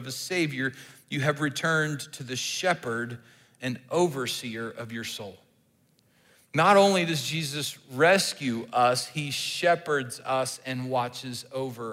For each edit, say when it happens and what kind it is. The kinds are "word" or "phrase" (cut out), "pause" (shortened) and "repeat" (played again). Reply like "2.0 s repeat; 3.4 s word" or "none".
none

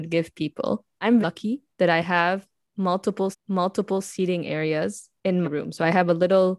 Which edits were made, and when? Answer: 1.2 s word; 1.7 s pause; 3.3 s repeat; 5.4 s word

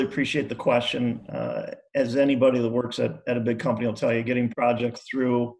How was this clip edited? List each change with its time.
none

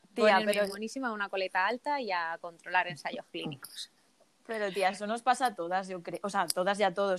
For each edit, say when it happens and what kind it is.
4.1 s pause

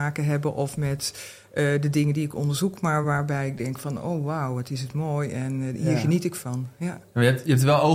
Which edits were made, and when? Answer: none

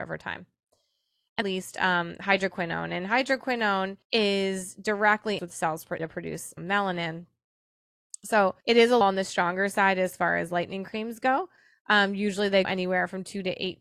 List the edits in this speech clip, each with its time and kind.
1.4 s phrase; 4.0 s pause; 5.4 s word; 6.0 s word; 6.6 s word; 8.6 s pause; 9.0 s word; 12.6 s word

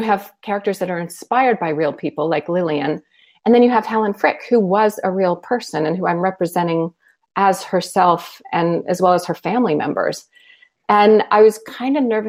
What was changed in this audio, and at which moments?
none

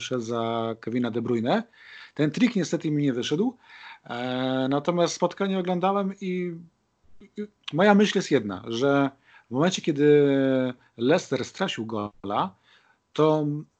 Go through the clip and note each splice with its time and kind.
none

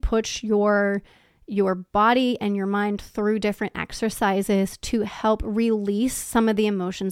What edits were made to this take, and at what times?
none

